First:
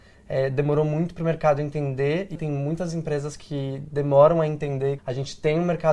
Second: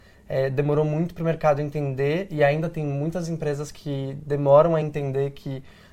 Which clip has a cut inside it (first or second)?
first